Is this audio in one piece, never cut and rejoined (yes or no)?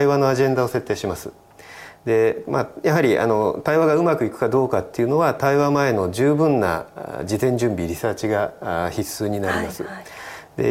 yes